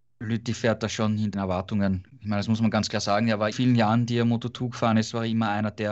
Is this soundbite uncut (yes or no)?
no